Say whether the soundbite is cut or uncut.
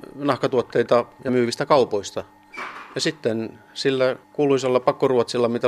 cut